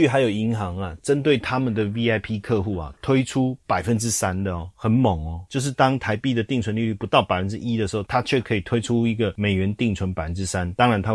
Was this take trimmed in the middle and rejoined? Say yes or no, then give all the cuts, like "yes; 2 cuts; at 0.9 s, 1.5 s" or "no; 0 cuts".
no; 0 cuts